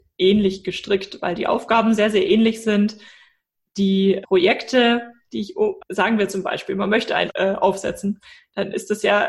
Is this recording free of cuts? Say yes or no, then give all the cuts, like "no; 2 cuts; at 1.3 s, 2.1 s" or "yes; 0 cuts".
no; 3 cuts; at 4.2 s, 5.8 s, 7.3 s